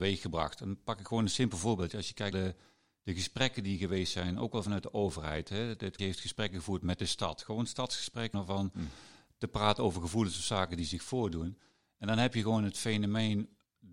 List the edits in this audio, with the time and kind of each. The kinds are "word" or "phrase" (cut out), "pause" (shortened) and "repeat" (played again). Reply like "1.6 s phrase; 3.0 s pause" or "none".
2.3 s word; 6.0 s word; 8.3 s word